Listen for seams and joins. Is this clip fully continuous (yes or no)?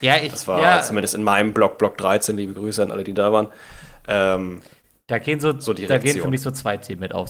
yes